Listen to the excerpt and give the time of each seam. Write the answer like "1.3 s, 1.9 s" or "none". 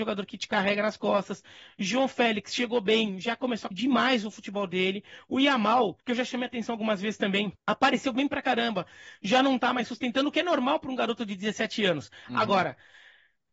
3.7 s, 6.0 s, 7.6 s